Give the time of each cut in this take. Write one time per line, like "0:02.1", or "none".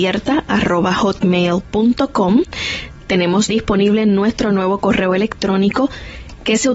0:03.5